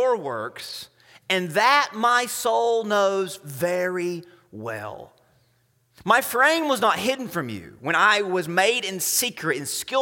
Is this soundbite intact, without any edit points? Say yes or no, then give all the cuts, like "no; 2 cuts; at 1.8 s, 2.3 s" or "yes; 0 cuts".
yes; 0 cuts